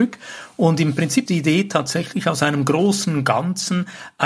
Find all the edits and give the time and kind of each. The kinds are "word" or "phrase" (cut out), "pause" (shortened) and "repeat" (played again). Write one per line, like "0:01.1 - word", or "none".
0:01.3 - word